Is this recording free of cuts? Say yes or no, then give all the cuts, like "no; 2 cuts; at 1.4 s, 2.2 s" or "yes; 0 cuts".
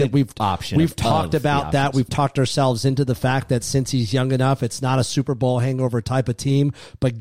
yes; 0 cuts